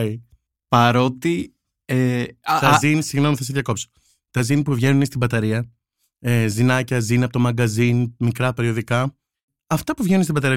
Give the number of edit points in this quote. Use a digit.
0